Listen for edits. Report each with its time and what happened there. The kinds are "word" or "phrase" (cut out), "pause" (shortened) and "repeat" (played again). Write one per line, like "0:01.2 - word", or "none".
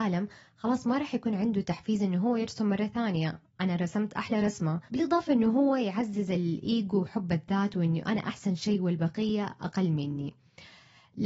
0:03.5 - pause
0:04.9 - pause

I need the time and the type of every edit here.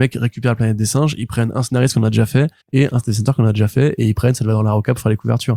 0:02.6 - pause

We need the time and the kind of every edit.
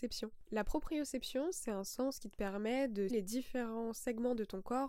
0:03.1 - word

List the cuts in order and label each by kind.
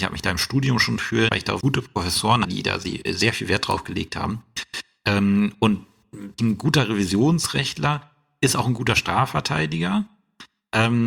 0:01.3 - word
0:01.6 - word
0:02.4 - word
0:06.4 - word

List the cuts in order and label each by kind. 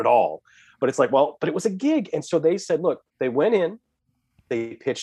0:03.1 - pause

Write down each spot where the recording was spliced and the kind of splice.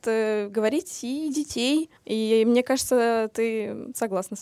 0:02.0 - pause

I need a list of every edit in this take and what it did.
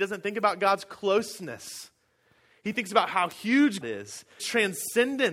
0:03.8 - word
0:04.4 - word

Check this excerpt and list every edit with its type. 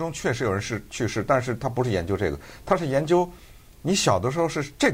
none

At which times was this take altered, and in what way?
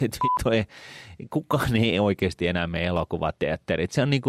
none

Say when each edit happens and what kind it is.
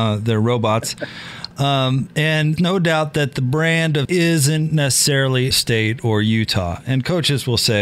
0:02.6 - word
0:04.1 - phrase
0:05.5 - word

